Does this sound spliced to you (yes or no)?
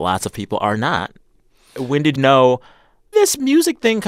yes